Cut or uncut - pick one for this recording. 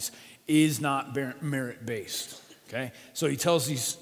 uncut